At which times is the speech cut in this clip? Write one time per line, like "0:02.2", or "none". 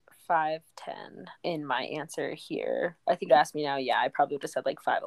0:01.4
0:03.3